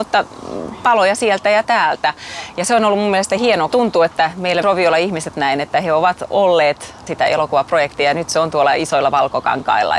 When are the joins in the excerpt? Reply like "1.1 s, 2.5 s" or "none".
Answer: 3.7 s, 4.6 s, 5.3 s, 7.1 s